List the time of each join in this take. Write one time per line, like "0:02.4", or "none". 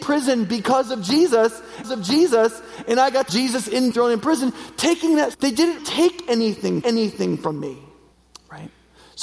0:01.8
0:03.3
0:03.9
0:05.3
0:05.8
0:06.8
0:08.1